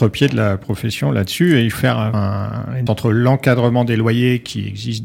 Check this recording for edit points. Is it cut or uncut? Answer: cut